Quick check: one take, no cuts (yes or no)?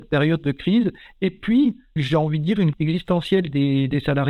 no